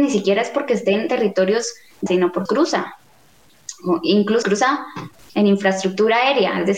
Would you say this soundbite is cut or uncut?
cut